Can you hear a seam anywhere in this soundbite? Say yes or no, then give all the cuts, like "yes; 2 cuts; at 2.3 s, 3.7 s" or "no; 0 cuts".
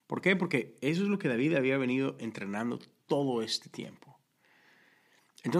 no; 0 cuts